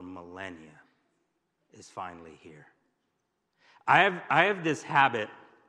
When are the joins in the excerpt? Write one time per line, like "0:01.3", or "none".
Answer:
none